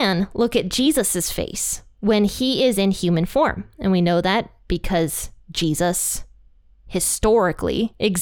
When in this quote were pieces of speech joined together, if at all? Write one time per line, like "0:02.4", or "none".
none